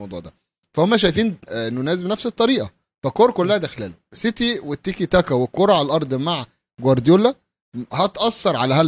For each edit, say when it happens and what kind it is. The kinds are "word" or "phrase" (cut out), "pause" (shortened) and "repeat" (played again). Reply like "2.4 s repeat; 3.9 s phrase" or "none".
1.4 s word